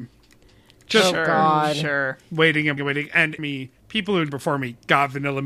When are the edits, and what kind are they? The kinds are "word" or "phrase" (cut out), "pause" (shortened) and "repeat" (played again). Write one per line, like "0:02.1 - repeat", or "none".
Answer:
0:02.8 - word
0:03.4 - word
0:03.8 - pause
0:04.3 - phrase